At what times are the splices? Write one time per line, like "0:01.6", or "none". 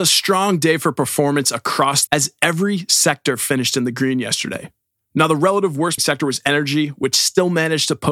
0:02.1
0:06.0